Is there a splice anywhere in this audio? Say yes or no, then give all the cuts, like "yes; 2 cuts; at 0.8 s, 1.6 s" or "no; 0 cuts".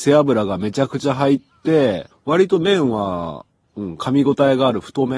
yes; 1 cut; at 2.1 s